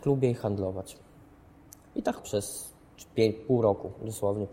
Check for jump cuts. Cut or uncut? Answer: cut